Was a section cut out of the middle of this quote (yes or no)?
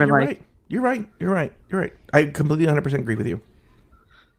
yes